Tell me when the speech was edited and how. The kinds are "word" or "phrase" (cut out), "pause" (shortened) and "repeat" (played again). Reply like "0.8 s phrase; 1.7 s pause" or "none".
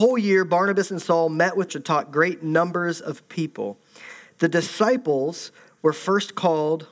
1.7 s phrase